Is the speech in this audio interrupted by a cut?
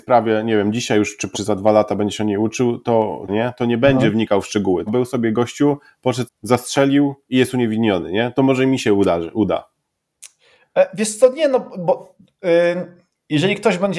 yes; 4 cuts; at 1.3 s, 3.3 s, 4.9 s, 6.3 s

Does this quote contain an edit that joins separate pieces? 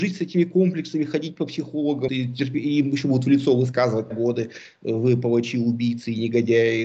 yes; 2 cuts; at 2.1 s, 4.1 s

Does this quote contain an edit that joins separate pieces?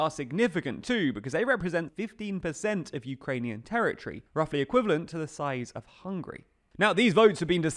yes; 2 cuts; at 1.9 s, 4.3 s

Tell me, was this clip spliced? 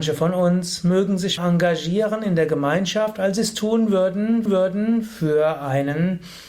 yes; 2 cuts; at 1.4 s, 4.5 s

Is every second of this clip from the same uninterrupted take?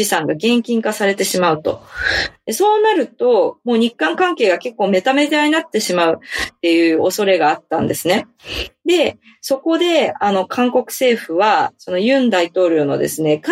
yes; 0 cuts

